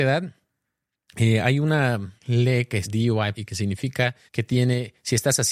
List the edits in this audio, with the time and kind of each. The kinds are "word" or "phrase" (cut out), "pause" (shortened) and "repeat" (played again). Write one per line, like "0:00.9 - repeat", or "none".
0:02.2 - pause
0:02.8 - phrase
0:03.3 - phrase
0:04.3 - pause